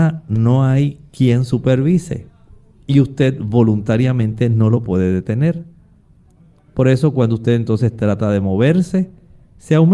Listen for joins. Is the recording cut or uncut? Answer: uncut